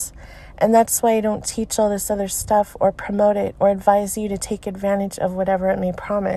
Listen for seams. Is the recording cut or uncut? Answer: uncut